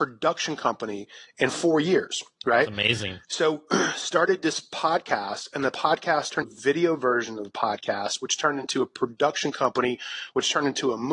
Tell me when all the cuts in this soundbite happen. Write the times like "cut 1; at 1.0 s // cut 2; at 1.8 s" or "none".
cut 1; at 3.2 s // cut 2; at 6.4 s